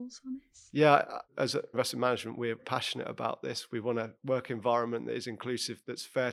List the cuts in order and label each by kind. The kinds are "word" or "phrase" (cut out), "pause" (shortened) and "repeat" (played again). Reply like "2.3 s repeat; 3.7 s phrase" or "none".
1.2 s pause; 1.7 s word; 2.6 s word; 4.1 s pause